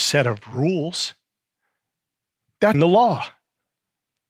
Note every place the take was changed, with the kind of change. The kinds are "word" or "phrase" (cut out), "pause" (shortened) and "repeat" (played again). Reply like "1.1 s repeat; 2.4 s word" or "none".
2.7 s word

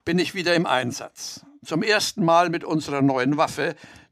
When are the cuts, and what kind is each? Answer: none

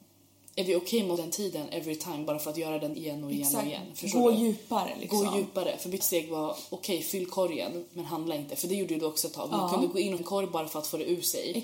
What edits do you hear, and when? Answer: 1.2 s word; 2.9 s word; 6.0 s word; 10.2 s word

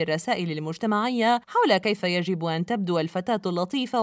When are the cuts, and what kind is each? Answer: none

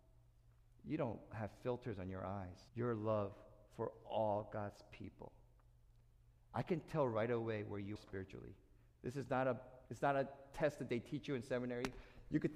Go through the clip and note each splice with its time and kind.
2.7 s pause; 8.0 s word; 9.9 s pause

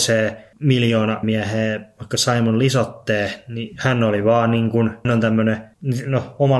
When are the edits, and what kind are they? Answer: 1.2 s word; 5.0 s word

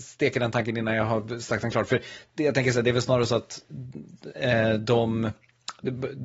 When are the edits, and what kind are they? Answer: none

